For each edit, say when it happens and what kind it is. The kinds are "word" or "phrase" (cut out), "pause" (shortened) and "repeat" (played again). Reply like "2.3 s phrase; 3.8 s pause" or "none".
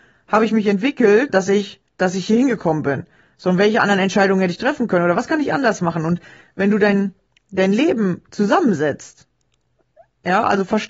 1.3 s word; 1.9 s pause